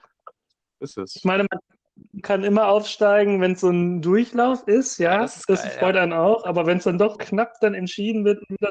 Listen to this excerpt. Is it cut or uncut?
cut